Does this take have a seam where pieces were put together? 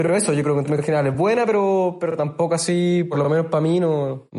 no; 0 cuts

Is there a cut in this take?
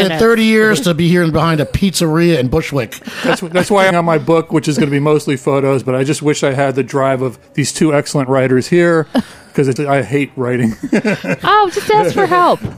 yes; 3 cuts; at 3.9 s, 7.4 s, 9.8 s

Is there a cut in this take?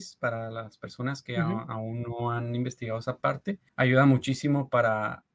yes; 1 cut; at 3.7 s

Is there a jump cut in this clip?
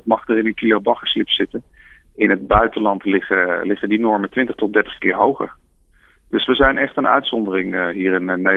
no; 0 cuts

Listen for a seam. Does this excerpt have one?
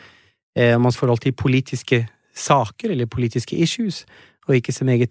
yes; 1 cut; at 0.9 s

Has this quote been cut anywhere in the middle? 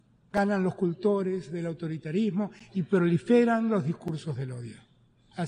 no; 0 cuts

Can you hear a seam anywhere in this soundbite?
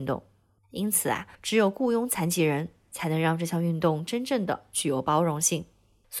yes; 1 cut; at 1.3 s

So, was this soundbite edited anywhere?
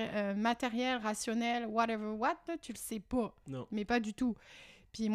no; 0 cuts

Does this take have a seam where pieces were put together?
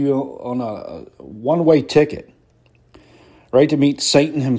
no; 0 cuts

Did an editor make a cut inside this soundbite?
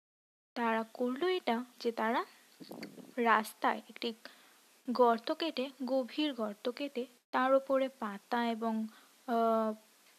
yes; 2 cuts; at 1.7 s, 7.2 s

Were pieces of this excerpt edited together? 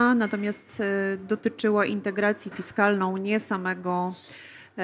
yes; 1 cut; at 2.5 s

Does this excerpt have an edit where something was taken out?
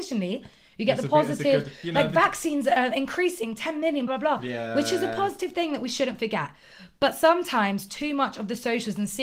yes; 1 cut; at 4.1 s

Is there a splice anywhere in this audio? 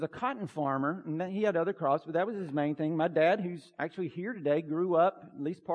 no; 0 cuts

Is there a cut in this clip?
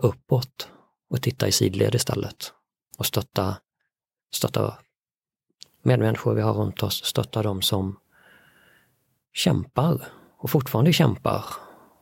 no; 0 cuts

